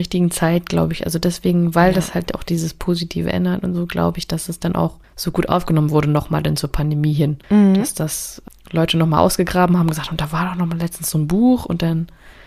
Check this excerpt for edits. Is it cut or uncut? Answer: uncut